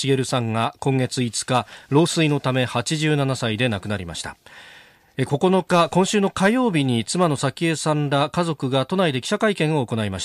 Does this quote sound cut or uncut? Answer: uncut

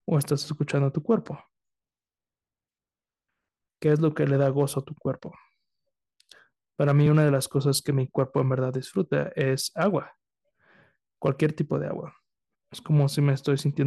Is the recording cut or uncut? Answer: uncut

